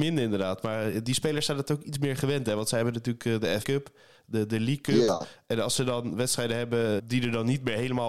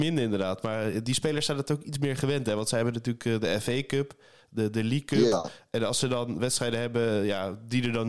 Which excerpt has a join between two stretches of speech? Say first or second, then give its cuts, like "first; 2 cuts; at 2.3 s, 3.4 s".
first; 2 cuts; at 3.6 s, 7.0 s